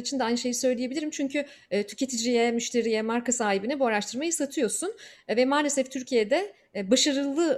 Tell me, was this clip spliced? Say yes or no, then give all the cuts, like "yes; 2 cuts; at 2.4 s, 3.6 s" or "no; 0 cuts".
no; 0 cuts